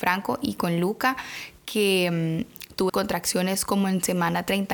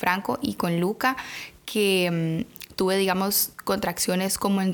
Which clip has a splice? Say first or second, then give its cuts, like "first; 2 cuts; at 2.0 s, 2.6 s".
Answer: first; 1 cut; at 2.9 s